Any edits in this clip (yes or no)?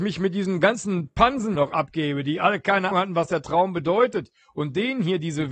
yes